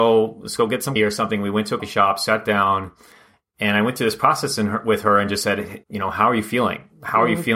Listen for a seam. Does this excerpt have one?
yes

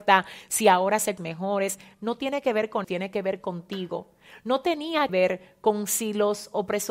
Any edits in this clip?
yes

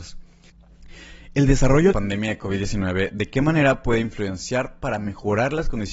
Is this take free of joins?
no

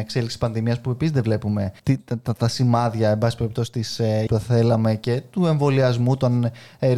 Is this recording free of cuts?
no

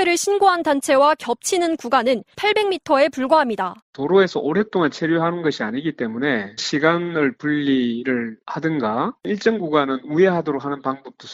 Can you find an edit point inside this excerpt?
yes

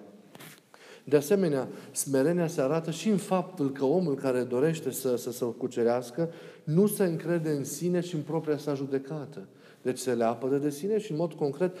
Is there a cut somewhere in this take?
no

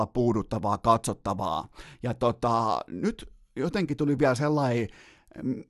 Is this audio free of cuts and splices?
yes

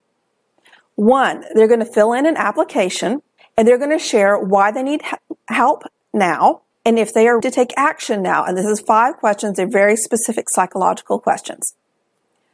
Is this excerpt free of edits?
no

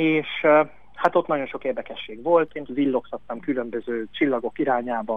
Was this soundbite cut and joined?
yes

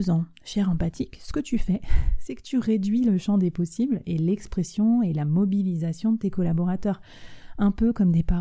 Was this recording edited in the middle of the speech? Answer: no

